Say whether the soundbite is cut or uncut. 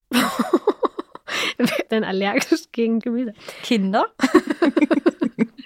cut